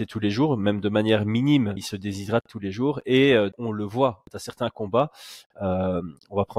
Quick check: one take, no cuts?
no; 3 cuts; at 1.8 s, 3.5 s, 4.2 s

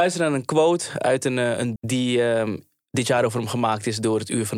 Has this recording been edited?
yes; 1 cut; at 1.8 s

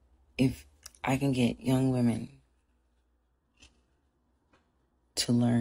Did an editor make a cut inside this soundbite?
no; 0 cuts

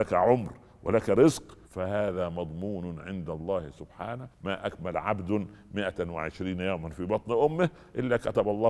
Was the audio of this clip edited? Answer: yes; 2 cuts; at 1.6 s, 4.3 s

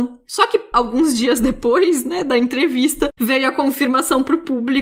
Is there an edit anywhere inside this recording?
no; 0 cuts

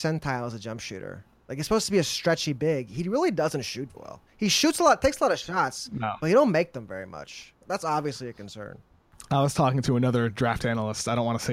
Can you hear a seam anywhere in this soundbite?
yes; 2 cuts; at 3.9 s, 7.6 s

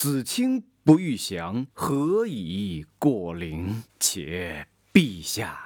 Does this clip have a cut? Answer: yes; 2 cuts; at 1.7 s, 3.9 s

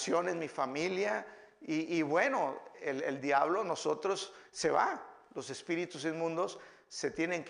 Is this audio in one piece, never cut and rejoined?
yes; 0 cuts

